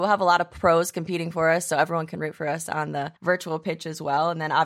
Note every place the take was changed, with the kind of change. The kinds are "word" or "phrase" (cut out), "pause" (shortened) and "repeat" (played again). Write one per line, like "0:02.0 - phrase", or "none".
0:03.2 - pause